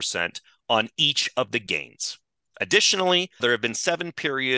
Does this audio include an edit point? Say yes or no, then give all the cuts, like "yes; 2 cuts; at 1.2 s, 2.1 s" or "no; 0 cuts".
yes; 1 cut; at 3.4 s